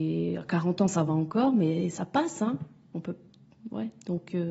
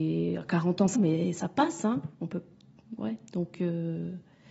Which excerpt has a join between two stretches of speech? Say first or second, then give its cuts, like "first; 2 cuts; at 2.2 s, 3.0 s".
second; 2 cuts; at 0.9 s, 2.1 s